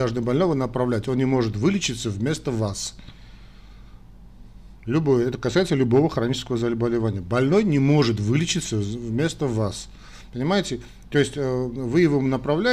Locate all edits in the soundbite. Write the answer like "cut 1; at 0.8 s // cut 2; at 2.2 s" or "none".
none